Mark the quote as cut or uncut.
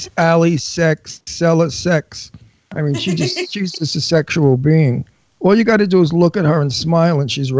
uncut